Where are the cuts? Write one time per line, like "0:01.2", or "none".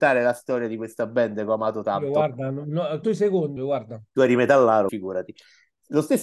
0:03.0
0:03.6
0:04.9